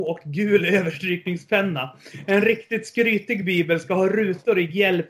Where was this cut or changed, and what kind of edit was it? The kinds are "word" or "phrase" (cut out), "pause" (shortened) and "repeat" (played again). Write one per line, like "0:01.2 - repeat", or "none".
none